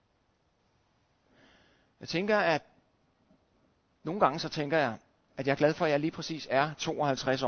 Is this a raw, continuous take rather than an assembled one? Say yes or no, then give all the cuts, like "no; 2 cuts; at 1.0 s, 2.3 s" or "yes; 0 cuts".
yes; 0 cuts